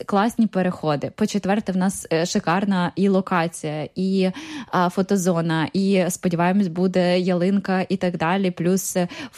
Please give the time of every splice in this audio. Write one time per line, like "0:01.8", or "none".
none